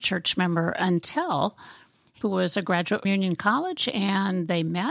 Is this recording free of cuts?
no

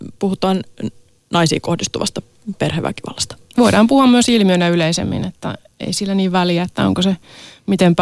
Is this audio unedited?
yes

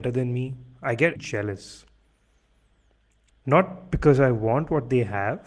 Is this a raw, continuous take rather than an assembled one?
no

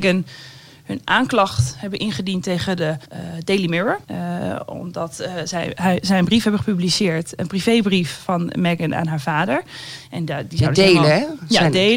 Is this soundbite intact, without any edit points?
no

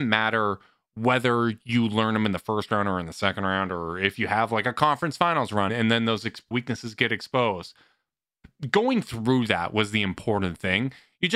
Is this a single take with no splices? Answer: no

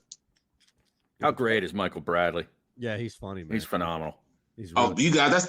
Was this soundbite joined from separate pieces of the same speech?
no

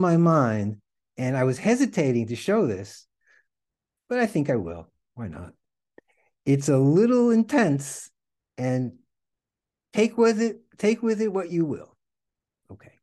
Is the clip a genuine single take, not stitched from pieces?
yes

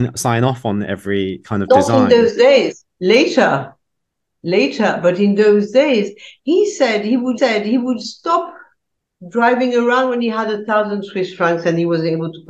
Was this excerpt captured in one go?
no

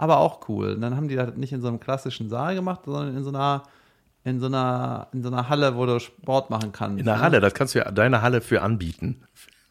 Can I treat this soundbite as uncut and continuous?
yes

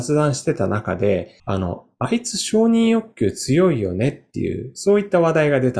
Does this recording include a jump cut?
yes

